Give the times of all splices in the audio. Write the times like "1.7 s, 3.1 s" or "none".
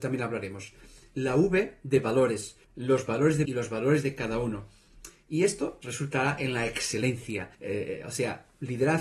2.6 s, 3.5 s, 5.8 s, 7.5 s